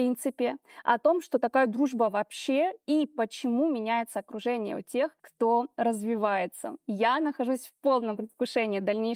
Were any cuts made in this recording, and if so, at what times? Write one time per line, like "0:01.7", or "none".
0:05.2